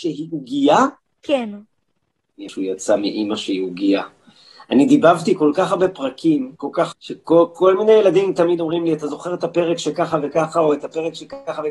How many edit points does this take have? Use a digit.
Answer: 3